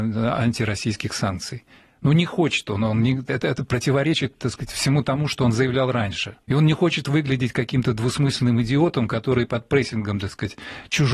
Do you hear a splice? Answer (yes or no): yes